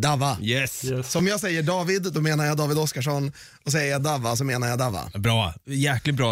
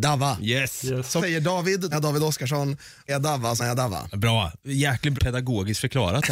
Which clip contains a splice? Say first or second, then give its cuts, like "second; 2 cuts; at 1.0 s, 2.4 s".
second; 5 cuts; at 1.2 s, 1.9 s, 3.1 s, 3.6 s, 5.2 s